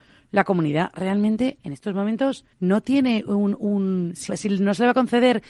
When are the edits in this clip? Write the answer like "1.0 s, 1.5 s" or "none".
2.5 s, 4.3 s